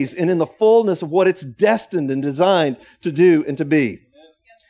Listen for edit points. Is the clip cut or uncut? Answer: uncut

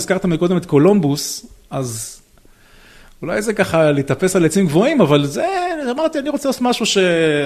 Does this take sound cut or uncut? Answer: uncut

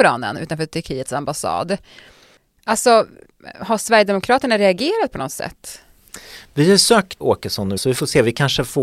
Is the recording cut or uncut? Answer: cut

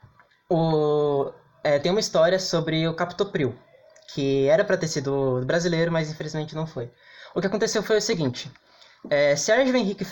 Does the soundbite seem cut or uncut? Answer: uncut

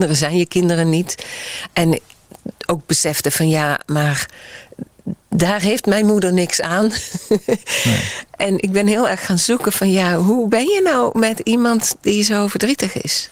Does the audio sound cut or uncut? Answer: cut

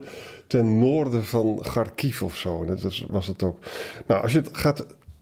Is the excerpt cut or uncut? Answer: cut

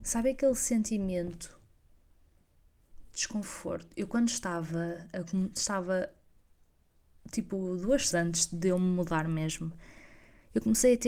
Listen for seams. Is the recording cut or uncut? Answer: cut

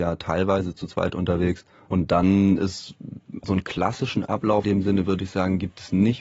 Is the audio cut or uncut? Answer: cut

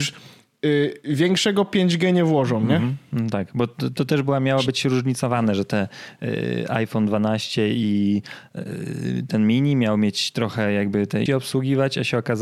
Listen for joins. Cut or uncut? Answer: cut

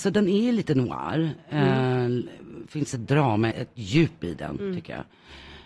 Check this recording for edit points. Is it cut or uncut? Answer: cut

